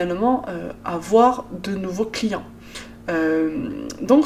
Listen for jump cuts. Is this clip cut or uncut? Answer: uncut